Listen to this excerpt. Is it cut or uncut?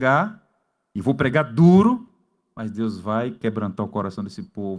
uncut